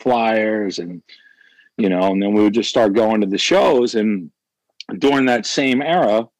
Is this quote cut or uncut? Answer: uncut